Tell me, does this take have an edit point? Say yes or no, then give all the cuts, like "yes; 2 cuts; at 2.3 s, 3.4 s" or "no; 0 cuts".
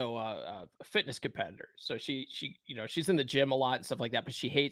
no; 0 cuts